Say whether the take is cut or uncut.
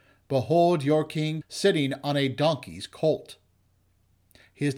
cut